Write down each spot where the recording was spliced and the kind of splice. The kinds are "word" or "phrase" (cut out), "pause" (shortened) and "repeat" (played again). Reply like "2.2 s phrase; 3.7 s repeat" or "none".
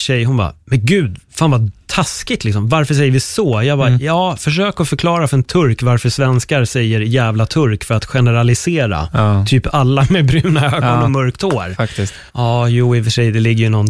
12.3 s pause